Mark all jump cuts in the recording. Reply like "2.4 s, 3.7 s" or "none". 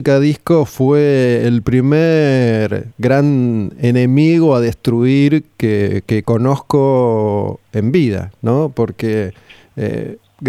none